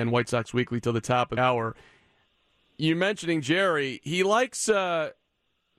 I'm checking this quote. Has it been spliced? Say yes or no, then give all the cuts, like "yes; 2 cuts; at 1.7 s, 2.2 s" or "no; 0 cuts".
yes; 1 cut; at 1.4 s